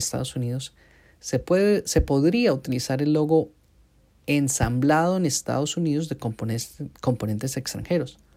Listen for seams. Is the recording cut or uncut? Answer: uncut